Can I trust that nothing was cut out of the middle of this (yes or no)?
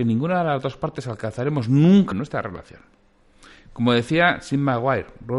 no